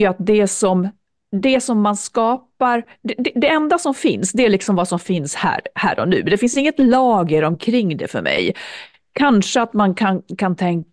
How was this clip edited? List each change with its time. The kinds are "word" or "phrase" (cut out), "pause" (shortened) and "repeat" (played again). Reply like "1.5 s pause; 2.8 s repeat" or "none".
none